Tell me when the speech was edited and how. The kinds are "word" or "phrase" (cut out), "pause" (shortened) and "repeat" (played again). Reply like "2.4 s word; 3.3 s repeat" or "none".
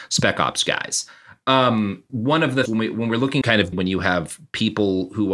2.1 s word; 2.7 s word; 3.4 s word; 3.7 s word